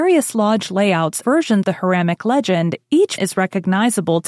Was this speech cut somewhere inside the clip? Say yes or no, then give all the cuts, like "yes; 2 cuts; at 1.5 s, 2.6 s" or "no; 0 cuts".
yes; 3 cuts; at 1.2 s, 1.6 s, 3.2 s